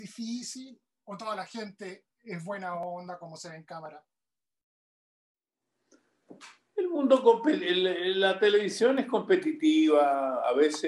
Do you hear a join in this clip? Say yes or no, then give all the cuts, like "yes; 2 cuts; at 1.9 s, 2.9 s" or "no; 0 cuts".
no; 0 cuts